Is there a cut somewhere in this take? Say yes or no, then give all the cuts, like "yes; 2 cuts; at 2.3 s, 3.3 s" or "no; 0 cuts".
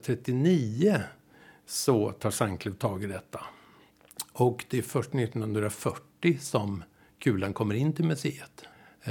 no; 0 cuts